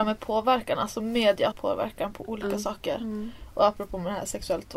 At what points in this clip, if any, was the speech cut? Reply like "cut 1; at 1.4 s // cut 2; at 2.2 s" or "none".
cut 1; at 1.5 s